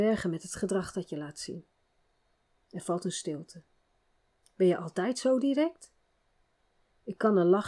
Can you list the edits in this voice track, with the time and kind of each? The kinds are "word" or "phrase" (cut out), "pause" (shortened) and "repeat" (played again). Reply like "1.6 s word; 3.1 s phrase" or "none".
none